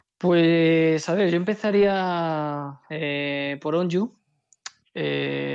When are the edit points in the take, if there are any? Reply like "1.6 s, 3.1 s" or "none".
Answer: none